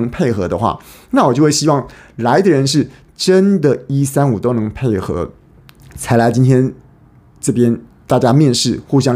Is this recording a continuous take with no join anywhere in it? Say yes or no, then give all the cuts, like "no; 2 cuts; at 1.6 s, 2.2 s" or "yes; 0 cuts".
yes; 0 cuts